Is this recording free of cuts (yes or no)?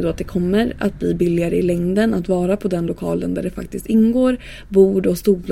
yes